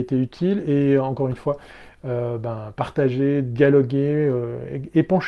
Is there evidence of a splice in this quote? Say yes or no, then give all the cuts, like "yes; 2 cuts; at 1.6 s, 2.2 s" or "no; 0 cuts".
no; 0 cuts